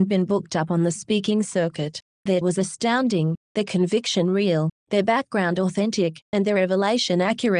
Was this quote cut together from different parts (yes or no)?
yes